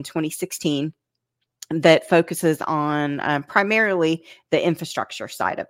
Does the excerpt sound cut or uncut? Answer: uncut